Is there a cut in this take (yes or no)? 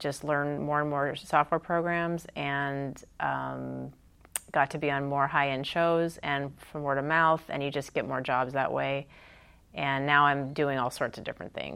no